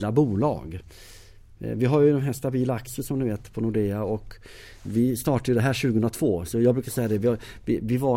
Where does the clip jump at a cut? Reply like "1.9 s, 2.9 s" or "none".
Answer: none